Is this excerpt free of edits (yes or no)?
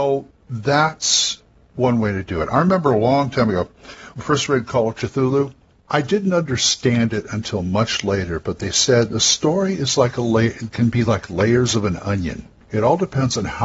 yes